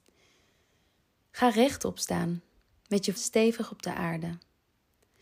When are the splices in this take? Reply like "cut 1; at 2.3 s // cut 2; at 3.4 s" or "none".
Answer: cut 1; at 3.2 s